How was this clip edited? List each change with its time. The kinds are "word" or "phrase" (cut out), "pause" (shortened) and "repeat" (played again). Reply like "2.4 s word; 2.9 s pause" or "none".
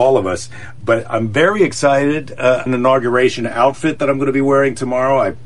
2.7 s phrase